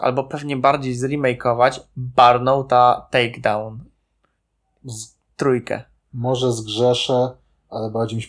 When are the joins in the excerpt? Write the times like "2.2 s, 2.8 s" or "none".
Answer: none